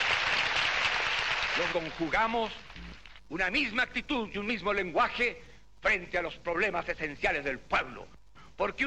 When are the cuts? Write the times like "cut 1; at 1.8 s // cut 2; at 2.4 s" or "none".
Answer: cut 1; at 1.7 s

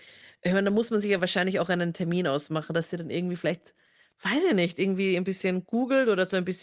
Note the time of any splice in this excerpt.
none

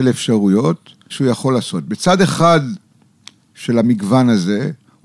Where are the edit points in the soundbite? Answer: cut 1; at 1.1 s

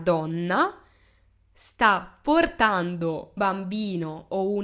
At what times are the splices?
cut 1; at 3.4 s

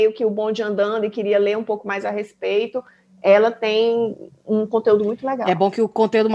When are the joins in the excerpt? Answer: none

